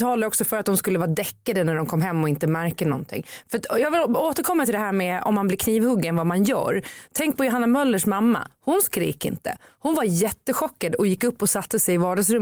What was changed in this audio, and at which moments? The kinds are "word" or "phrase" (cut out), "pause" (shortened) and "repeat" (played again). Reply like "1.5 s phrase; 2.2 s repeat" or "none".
none